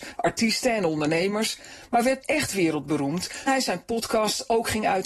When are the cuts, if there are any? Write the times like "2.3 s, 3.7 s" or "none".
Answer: 2.2 s, 3.5 s